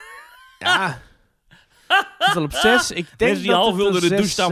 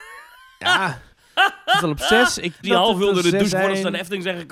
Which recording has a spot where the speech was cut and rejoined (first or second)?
second